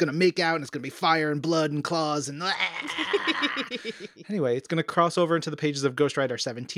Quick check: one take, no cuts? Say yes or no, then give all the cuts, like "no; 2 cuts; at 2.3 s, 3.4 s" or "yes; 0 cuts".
yes; 0 cuts